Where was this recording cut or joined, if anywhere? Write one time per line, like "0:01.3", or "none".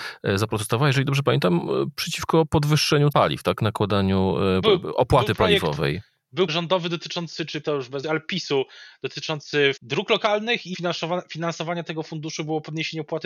0:03.1
0:04.6
0:06.5
0:07.6
0:08.0
0:09.8
0:10.7